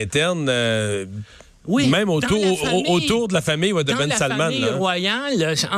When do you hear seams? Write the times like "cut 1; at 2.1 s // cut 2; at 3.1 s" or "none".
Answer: none

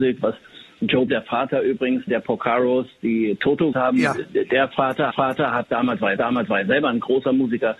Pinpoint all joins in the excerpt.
cut 1; at 1.1 s // cut 2; at 2.1 s // cut 3; at 3.7 s // cut 4; at 5.1 s // cut 5; at 6.2 s

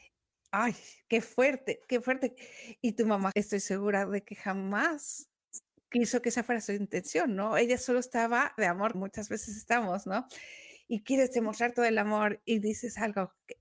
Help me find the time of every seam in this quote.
cut 1; at 3.3 s // cut 2; at 8.6 s // cut 3; at 8.9 s

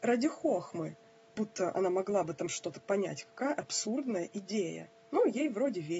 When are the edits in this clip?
cut 1; at 1.3 s

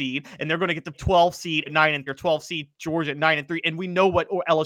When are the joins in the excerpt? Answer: cut 1; at 0.9 s // cut 2; at 1.7 s // cut 3; at 2.1 s

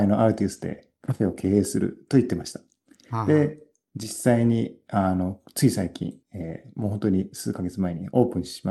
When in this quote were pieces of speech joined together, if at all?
cut 1; at 6.2 s

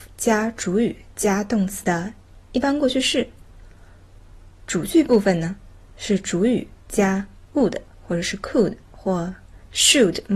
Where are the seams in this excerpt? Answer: none

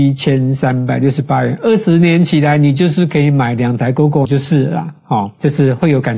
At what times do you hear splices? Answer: cut 1; at 4.2 s

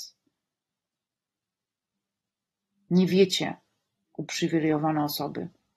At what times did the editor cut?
none

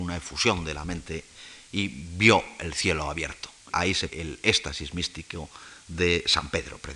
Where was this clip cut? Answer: cut 1; at 3.7 s // cut 2; at 4.1 s

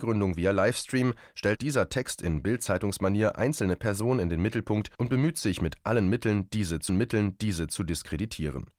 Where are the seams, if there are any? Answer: cut 1; at 1.6 s // cut 2; at 3.3 s // cut 3; at 4.9 s // cut 4; at 6.9 s

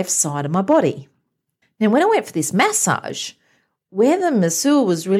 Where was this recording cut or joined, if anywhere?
cut 1; at 1.6 s

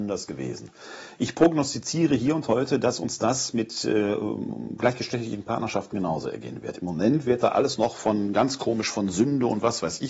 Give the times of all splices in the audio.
none

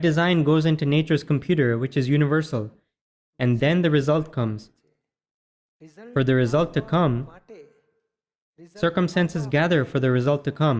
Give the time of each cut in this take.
none

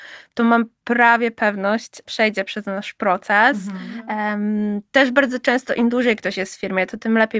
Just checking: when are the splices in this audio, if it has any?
cut 1; at 2.0 s

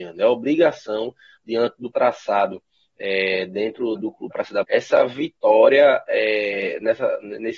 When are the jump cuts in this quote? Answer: cut 1; at 1.9 s // cut 2; at 4.0 s // cut 3; at 4.3 s // cut 4; at 4.6 s

